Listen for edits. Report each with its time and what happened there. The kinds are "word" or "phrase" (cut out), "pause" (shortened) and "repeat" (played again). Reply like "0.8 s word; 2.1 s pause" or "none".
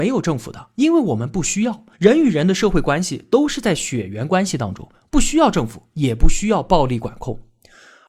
1.9 s pause

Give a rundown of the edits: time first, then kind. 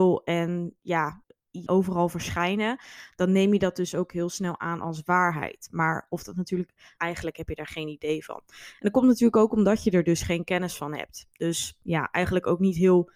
1.7 s phrase; 7.0 s phrase

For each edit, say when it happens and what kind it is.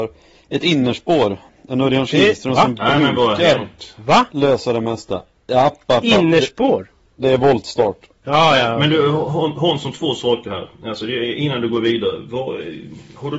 none

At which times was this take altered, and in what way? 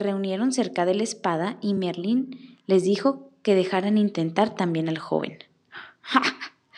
none

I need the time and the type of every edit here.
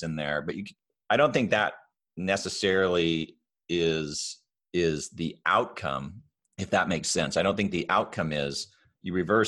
none

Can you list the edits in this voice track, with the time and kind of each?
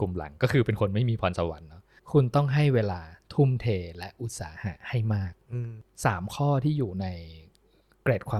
2.0 s pause

